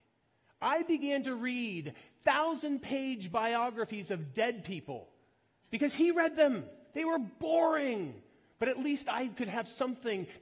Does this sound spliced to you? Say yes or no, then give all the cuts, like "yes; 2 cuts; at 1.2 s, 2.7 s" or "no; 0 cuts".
no; 0 cuts